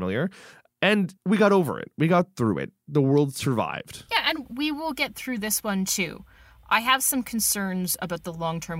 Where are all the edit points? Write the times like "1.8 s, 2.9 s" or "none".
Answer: none